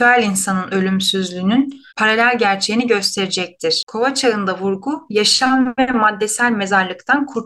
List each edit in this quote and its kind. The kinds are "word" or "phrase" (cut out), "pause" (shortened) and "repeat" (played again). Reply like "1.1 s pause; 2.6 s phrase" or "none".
1.9 s pause

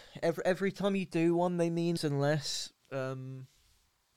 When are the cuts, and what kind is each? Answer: 2.0 s word; 2.8 s pause

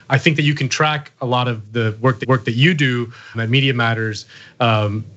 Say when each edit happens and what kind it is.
2.2 s repeat; 3.3 s word

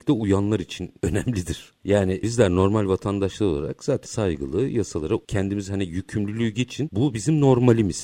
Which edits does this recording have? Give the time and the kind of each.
4.1 s word; 5.2 s word

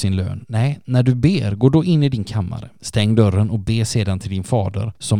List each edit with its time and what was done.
none

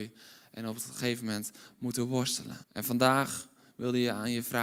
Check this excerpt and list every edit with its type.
1.7 s phrase; 2.6 s pause

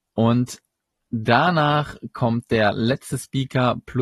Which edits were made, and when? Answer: none

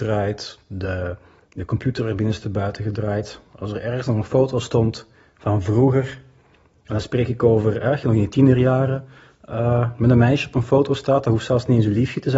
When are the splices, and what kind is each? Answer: none

